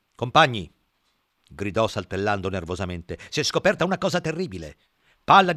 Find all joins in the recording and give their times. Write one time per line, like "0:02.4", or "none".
none